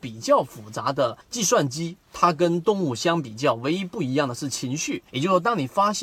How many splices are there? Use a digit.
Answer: 2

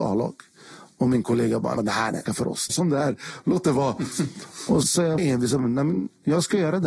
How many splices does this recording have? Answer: 5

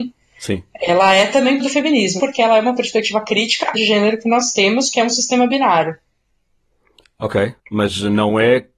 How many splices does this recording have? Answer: 4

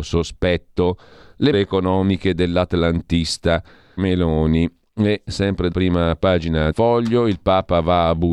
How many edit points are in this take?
4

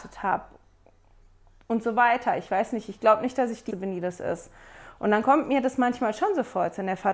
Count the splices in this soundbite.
1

